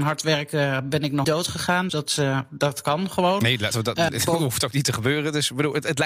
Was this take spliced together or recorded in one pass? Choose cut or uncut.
cut